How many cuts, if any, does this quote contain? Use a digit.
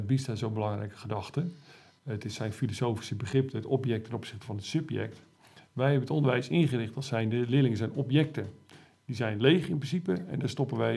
0